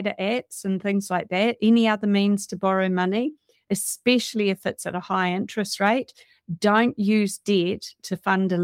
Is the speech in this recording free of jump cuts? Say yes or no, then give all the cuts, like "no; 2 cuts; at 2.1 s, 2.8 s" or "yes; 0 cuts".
yes; 0 cuts